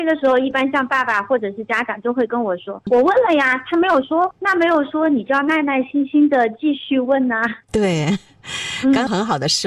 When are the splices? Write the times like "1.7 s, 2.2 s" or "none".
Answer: 7.6 s